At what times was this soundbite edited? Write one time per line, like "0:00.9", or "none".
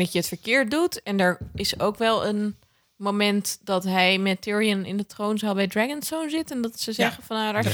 none